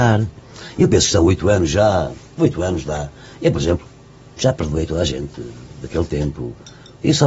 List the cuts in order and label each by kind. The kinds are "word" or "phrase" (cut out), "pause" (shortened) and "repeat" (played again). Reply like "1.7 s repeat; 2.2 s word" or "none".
none